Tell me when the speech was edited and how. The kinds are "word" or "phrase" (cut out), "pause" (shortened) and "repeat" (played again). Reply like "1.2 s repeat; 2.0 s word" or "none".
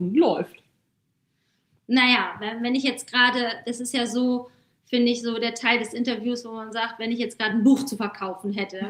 none